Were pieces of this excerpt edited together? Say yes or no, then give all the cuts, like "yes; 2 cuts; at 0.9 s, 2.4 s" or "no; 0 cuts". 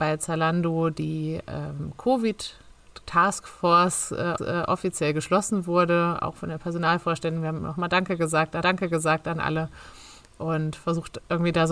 yes; 2 cuts; at 4.4 s, 8.6 s